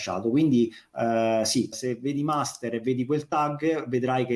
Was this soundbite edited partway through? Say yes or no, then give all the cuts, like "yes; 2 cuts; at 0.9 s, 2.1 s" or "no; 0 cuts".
yes; 1 cut; at 1.7 s